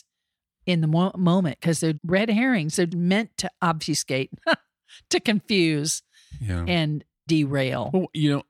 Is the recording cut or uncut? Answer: cut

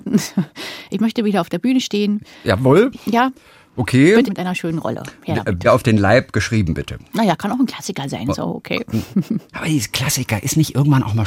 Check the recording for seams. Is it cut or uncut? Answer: cut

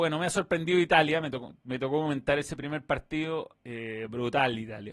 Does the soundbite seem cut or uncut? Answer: uncut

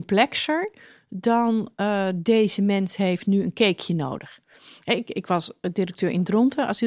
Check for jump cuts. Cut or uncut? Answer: uncut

